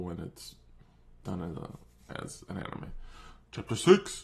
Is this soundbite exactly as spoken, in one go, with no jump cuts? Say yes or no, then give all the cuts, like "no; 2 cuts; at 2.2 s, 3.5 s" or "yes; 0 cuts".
yes; 0 cuts